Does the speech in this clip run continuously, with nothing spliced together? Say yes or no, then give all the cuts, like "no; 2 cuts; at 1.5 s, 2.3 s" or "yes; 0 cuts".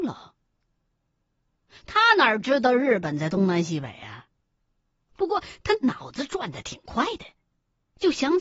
yes; 0 cuts